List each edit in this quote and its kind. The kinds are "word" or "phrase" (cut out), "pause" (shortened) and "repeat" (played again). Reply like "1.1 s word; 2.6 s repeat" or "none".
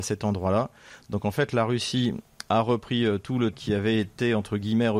3.5 s word